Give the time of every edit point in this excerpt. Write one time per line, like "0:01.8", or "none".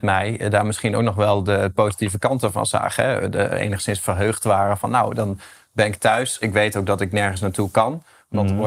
none